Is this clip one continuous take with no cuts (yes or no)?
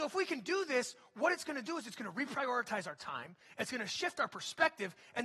yes